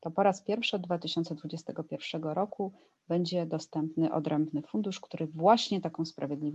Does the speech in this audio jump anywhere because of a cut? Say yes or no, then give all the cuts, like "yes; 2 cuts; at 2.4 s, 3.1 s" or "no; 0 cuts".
no; 0 cuts